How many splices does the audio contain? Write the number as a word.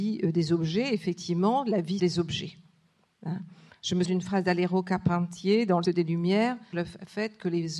four